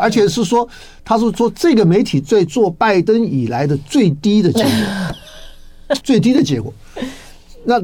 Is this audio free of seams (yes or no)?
no